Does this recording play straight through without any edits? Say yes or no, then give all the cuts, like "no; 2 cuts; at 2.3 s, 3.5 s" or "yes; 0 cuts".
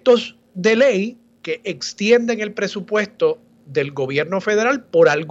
no; 1 cut; at 3.6 s